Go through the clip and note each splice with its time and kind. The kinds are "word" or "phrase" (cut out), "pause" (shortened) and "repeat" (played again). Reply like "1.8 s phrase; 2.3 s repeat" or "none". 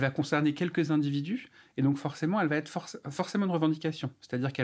none